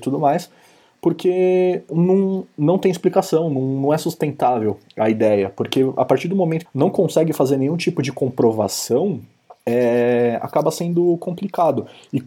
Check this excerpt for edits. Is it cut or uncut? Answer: cut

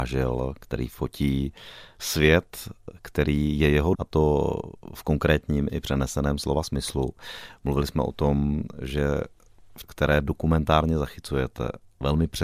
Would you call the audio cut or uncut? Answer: cut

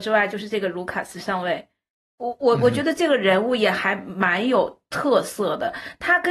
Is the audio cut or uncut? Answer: uncut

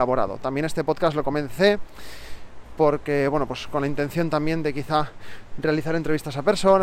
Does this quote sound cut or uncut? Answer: uncut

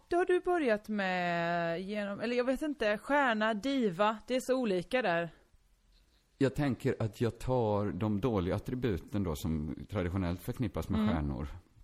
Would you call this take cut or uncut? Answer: uncut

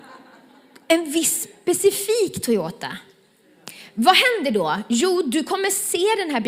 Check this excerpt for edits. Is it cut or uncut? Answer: uncut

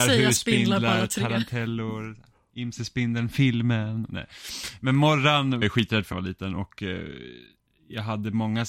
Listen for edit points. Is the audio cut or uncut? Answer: cut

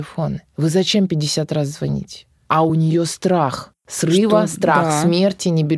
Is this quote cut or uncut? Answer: uncut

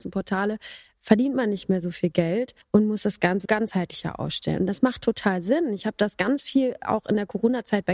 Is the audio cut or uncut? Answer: cut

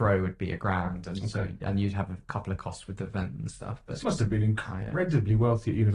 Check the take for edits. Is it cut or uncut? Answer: cut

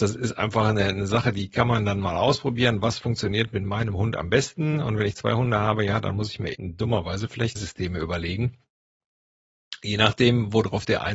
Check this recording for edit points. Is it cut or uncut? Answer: cut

